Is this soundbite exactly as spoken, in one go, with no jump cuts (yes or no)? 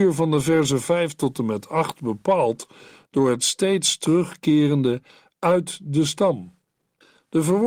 yes